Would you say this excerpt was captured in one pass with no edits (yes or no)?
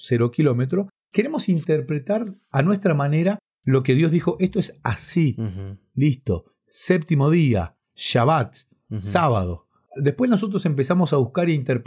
yes